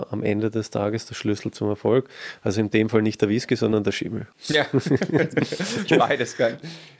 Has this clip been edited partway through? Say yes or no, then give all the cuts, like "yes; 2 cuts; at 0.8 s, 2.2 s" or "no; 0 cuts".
no; 0 cuts